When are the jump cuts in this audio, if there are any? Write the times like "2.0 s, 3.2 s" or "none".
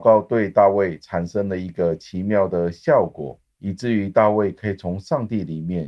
3.5 s